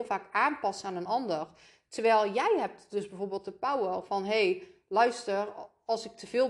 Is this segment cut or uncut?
uncut